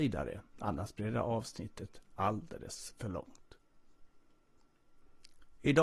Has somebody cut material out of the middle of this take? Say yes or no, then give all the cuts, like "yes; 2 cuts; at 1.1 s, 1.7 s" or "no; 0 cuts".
no; 0 cuts